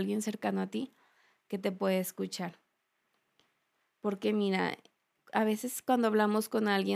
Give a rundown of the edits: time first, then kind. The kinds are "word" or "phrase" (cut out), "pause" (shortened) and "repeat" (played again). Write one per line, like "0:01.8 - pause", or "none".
none